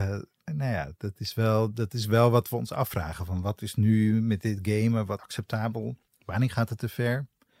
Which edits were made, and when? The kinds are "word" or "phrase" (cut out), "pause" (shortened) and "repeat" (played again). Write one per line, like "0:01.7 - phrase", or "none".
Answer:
0:05.2 - word
0:06.1 - pause